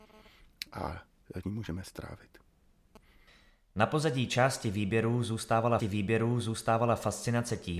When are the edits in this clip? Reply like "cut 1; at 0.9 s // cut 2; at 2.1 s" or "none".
cut 1; at 1.4 s // cut 2; at 5.8 s